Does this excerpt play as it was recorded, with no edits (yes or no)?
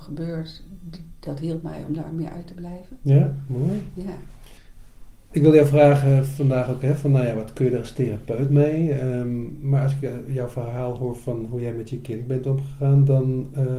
yes